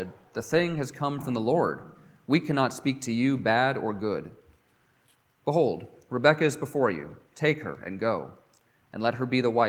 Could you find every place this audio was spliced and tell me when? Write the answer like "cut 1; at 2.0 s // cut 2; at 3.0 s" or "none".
none